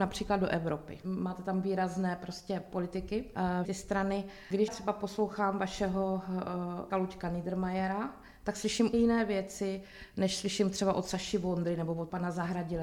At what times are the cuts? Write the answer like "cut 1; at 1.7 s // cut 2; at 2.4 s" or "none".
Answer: cut 1; at 3.6 s // cut 2; at 4.7 s // cut 3; at 6.9 s // cut 4; at 8.9 s